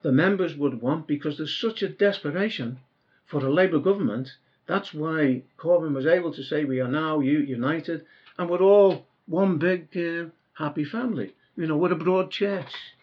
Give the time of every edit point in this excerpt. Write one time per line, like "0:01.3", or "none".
none